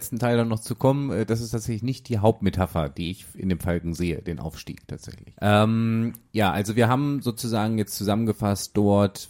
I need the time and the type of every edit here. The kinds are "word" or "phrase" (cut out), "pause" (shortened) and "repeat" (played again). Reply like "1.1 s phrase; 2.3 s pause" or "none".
none